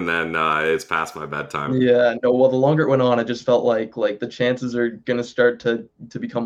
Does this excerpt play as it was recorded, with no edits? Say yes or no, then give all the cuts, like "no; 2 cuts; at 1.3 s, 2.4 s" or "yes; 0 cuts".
yes; 0 cuts